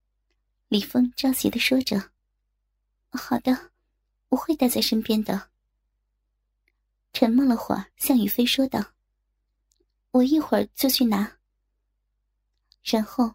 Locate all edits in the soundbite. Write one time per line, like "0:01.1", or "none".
0:02.2
0:07.9